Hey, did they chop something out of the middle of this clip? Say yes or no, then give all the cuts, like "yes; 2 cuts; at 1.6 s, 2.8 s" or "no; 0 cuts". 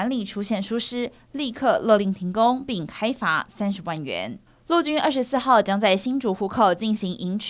yes; 1 cut; at 4.5 s